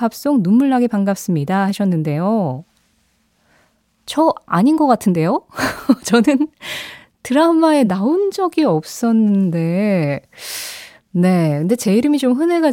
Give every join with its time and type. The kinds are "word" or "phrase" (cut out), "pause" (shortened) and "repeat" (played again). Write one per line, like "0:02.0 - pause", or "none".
none